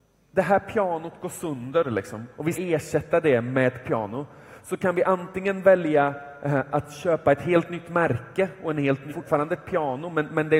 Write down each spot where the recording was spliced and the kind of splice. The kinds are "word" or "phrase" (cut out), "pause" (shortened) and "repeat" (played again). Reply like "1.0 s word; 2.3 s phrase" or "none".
2.5 s word; 3.8 s word; 9.1 s word